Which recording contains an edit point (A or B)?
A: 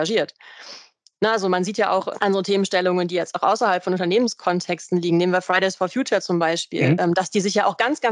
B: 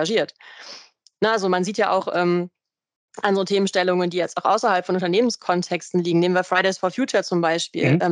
A